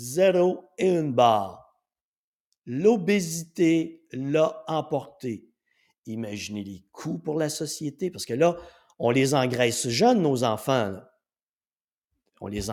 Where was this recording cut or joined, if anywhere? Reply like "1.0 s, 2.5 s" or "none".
none